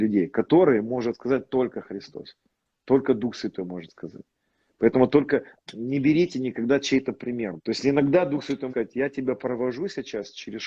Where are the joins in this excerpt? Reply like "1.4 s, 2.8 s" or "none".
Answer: 5.5 s, 7.6 s, 8.7 s